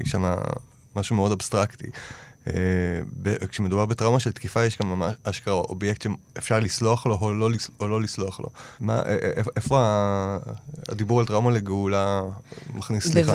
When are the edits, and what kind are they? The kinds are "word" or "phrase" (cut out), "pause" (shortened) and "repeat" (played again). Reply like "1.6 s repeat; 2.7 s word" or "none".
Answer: 8.8 s pause